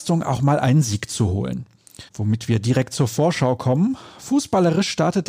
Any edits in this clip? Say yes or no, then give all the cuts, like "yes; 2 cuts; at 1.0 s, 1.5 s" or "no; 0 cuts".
yes; 1 cut; at 2.1 s